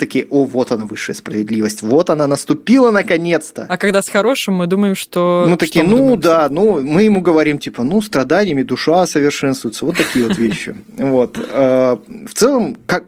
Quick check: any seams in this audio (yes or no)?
no